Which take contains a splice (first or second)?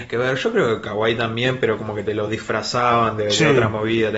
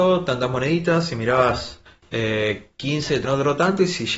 second